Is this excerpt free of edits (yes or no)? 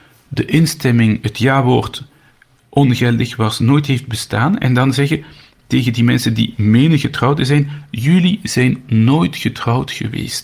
yes